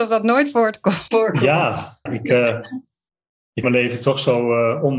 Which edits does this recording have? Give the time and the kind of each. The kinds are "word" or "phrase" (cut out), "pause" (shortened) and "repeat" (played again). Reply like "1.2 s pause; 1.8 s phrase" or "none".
2.1 s word; 3.6 s word